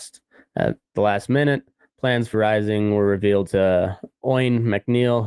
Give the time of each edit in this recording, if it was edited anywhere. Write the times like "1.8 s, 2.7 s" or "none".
2.3 s